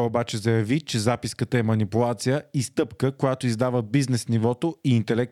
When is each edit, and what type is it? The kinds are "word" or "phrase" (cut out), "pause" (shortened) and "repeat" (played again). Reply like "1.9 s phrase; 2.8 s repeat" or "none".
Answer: none